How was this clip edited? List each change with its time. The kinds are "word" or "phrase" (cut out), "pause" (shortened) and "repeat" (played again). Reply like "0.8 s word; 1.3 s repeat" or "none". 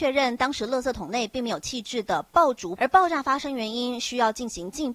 2.8 s phrase